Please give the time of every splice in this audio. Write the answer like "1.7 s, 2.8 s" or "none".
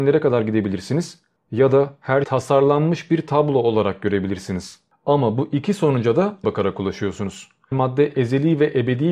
2.2 s, 6.4 s, 7.7 s